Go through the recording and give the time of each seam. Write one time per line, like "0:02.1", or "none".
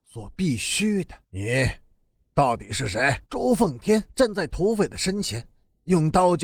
0:01.2
0:03.3
0:04.1